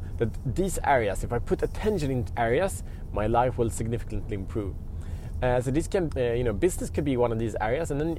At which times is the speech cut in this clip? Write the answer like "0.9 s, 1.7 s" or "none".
2.3 s, 6.1 s